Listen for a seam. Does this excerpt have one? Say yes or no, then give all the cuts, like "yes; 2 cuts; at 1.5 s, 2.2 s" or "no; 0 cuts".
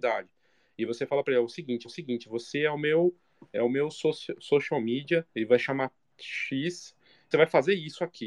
yes; 3 cuts; at 1.8 s, 5.3 s, 7.3 s